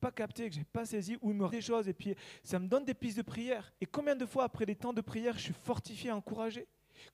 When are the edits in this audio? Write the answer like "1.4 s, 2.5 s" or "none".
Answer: 1.5 s, 3.8 s

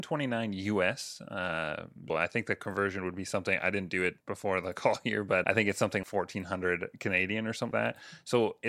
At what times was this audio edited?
2.1 s, 4.2 s, 5.4 s, 6.0 s, 7.7 s

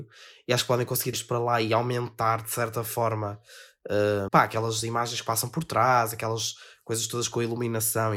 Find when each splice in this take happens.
1.1 s, 4.3 s

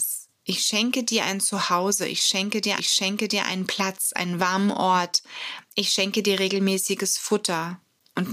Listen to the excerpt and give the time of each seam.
2.8 s

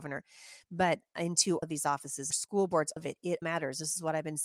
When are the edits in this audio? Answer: 1.6 s, 2.3 s, 3.0 s, 3.4 s

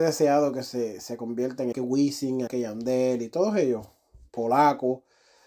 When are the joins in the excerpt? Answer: 1.7 s, 2.5 s

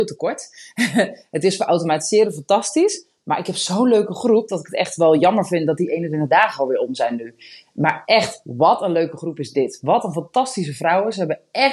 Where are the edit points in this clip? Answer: none

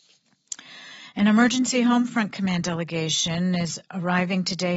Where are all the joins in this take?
3.8 s

